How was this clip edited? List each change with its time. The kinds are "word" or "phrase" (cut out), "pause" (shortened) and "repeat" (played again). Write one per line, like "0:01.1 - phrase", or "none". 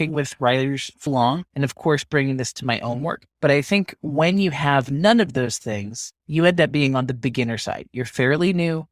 0:01.1 - word
0:03.3 - pause
0:06.2 - pause

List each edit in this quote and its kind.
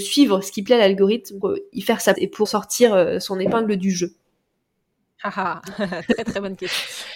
0:01.4 - word
0:02.1 - word
0:02.4 - word

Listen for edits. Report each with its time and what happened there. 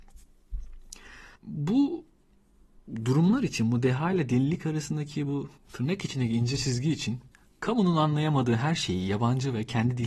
0:01.4 - pause
0:05.6 - pause
0:07.3 - pause

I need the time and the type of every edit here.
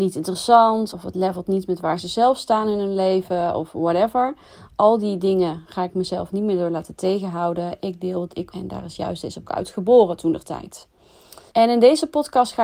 0:00.9 - word
0:08.5 - phrase
0:09.4 - phrase
0:11.5 - pause

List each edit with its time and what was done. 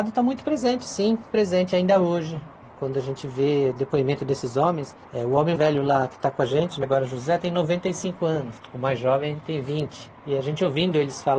0:01.3 - word
0:05.0 - pause
0:05.6 - word
0:06.8 - word
0:10.2 - pause

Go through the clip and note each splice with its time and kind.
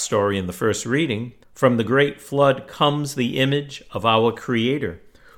0:01.4 - pause

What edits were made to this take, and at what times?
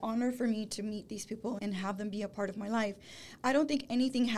0:01.6 - word

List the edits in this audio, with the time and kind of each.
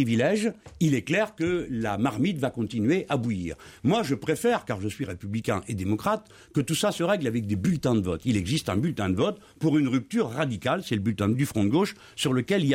0:11.3 - word

